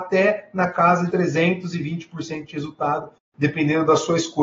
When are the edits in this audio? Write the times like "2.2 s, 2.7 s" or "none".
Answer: 1.1 s